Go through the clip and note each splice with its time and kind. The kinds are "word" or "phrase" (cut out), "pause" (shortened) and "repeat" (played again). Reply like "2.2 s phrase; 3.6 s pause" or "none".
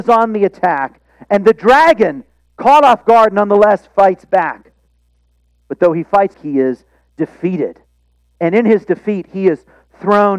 6.3 s word